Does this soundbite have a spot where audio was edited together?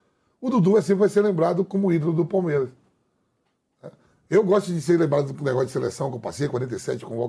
no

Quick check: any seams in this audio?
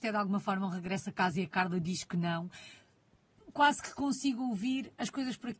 no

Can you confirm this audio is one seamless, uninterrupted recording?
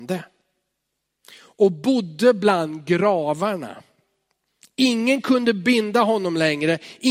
yes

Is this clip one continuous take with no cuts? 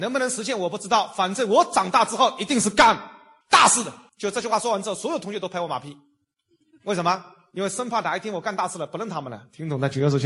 no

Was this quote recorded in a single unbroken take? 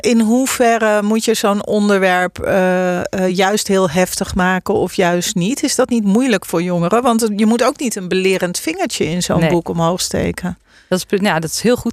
yes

